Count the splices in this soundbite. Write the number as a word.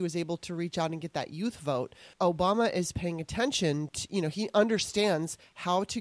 one